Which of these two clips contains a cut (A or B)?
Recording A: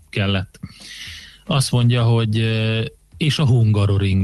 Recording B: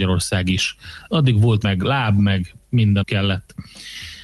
B